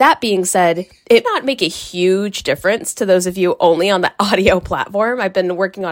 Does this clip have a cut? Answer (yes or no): yes